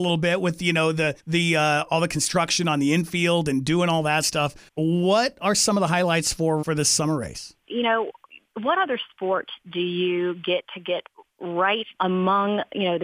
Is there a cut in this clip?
yes; 4 cuts; at 1.2 s, 4.7 s, 6.6 s, 11.9 s

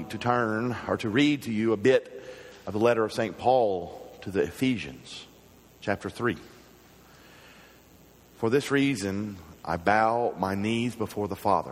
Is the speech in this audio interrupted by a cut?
no; 0 cuts

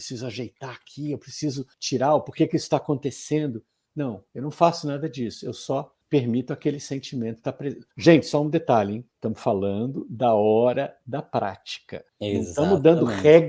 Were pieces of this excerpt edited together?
yes; 6 cuts; at 1.7 s, 4.3 s, 6.0 s, 7.9 s, 9.1 s, 12.1 s

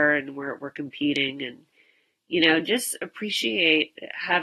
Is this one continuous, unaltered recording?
yes; 0 cuts

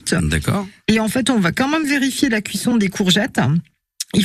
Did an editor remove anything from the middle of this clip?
no; 0 cuts

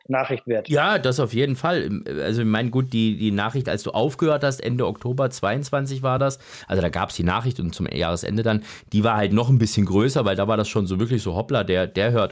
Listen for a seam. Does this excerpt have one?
no; 0 cuts

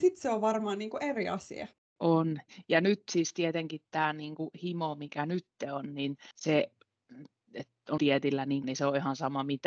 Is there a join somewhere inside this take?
yes; 4 cuts; at 1.7 s, 6.3 s, 8.0 s, 8.6 s

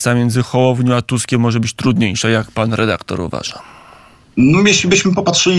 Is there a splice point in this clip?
no; 0 cuts

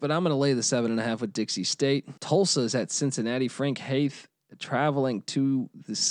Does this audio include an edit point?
yes; 1 cut; at 2.2 s

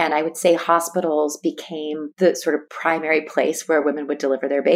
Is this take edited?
no; 0 cuts

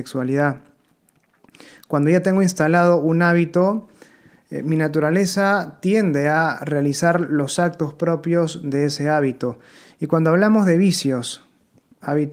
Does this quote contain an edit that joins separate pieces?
no; 0 cuts

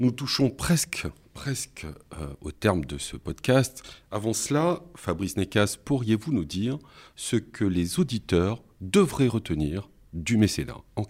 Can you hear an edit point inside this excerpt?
no; 0 cuts

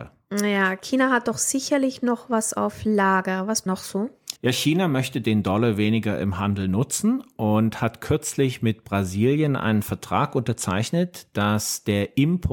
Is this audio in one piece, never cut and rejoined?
no; 2 cuts; at 3.7 s, 4.4 s

